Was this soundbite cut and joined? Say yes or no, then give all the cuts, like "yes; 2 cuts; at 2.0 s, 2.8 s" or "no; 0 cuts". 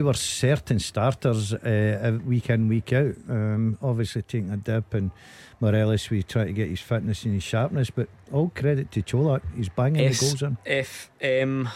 no; 0 cuts